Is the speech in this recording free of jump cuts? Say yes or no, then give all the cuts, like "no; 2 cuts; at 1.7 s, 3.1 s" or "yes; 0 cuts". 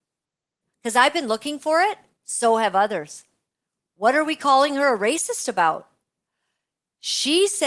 yes; 0 cuts